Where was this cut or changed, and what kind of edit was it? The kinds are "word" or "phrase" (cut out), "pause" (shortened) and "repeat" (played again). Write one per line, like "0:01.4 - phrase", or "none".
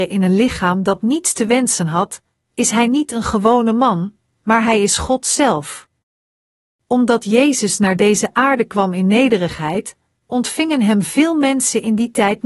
none